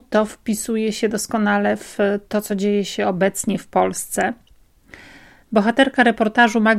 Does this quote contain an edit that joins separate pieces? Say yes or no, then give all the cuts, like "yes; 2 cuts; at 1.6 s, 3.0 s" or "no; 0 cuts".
no; 0 cuts